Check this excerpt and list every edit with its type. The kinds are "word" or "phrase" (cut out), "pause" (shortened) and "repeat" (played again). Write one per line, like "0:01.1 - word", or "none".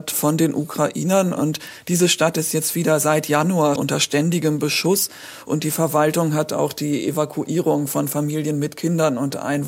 0:03.8 - word